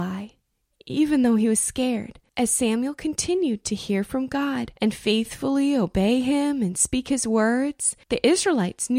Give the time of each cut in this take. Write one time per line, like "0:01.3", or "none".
0:02.3
0:04.8
0:08.0